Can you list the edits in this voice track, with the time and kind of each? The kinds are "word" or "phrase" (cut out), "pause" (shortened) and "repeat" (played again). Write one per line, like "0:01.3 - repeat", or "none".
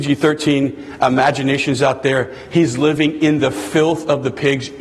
none